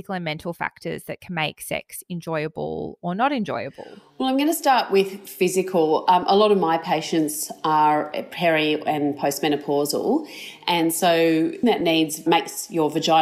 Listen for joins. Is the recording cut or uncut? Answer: cut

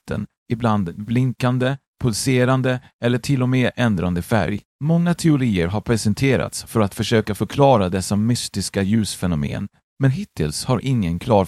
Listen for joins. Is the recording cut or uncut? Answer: cut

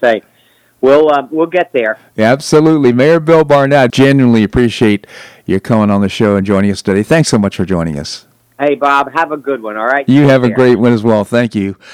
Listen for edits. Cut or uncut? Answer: cut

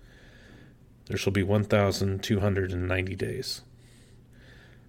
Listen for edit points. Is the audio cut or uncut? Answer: uncut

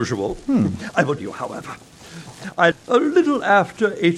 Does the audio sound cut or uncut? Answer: cut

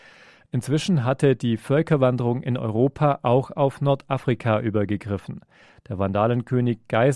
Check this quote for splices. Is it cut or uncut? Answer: uncut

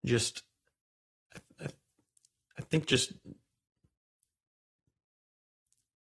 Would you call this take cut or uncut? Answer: uncut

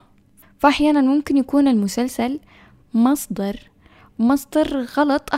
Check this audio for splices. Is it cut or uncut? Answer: uncut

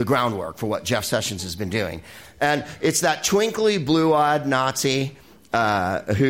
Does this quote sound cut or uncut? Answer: uncut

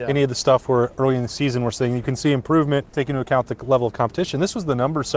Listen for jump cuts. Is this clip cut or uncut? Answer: cut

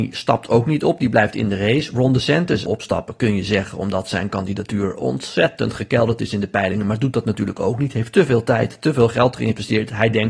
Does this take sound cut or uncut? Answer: cut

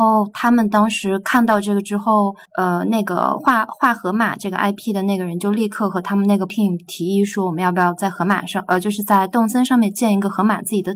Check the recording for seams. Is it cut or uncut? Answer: cut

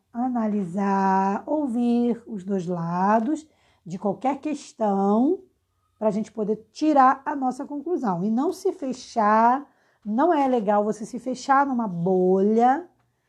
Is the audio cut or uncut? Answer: uncut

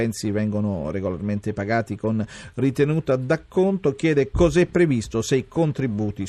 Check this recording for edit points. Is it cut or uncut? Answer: uncut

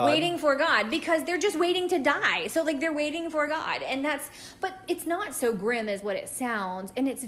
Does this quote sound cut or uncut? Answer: uncut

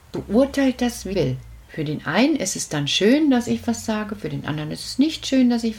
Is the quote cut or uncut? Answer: cut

